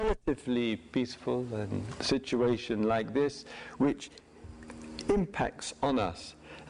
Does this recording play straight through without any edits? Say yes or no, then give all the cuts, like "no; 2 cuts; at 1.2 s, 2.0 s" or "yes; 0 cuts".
yes; 0 cuts